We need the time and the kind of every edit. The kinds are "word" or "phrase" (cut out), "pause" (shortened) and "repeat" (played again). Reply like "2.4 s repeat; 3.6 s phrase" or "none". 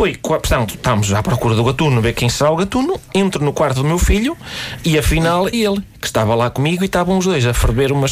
5.5 s word; 6.6 s word